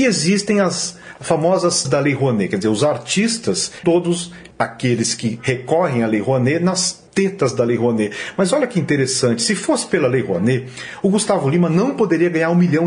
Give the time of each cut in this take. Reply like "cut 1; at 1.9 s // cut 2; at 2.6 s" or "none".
cut 1; at 1.8 s // cut 2; at 3.8 s // cut 3; at 4.5 s // cut 4; at 7.1 s